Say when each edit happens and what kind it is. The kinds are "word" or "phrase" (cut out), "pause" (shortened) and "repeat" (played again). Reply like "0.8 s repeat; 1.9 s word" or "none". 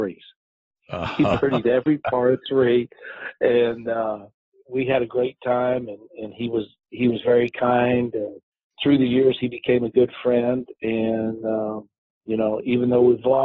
none